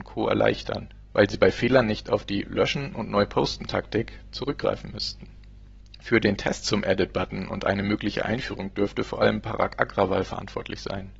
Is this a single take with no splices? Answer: yes; 0 cuts

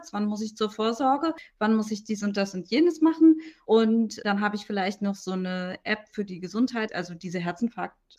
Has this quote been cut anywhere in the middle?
no; 0 cuts

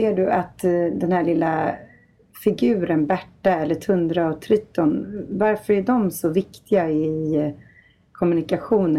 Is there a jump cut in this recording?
no; 0 cuts

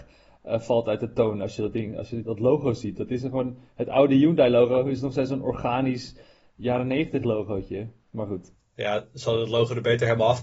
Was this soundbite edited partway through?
no; 0 cuts

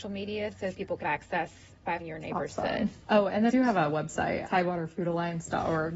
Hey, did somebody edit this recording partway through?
yes; 3 cuts; at 1.0 s, 2.0 s, 3.5 s

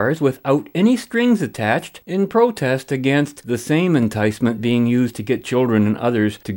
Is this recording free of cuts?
yes; 0 cuts

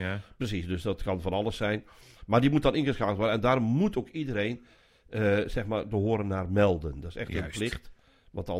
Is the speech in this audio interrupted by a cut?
no; 0 cuts

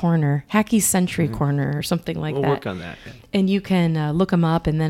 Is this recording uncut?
yes; 0 cuts

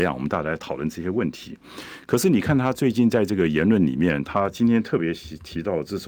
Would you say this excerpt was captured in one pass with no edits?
yes; 0 cuts

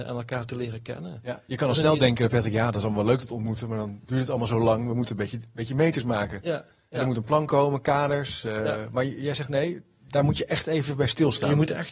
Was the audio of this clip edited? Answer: no; 0 cuts

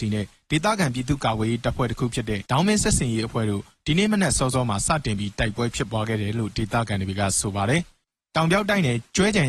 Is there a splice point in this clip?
yes; 1 cut; at 2.4 s

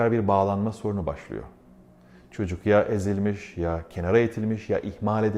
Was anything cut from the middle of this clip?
no; 0 cuts

